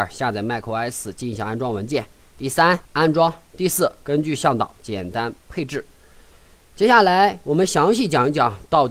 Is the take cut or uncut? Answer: cut